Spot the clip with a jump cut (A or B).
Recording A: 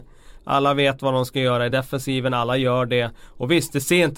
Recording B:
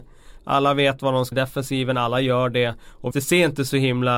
B